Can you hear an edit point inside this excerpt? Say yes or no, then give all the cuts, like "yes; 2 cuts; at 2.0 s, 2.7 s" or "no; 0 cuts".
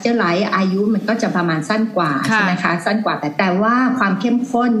yes; 1 cut; at 3.4 s